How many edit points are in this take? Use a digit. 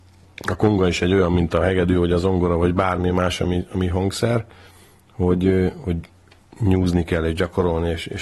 0